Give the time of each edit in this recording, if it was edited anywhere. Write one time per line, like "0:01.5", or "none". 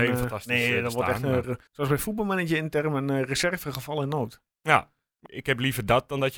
0:01.7
0:05.3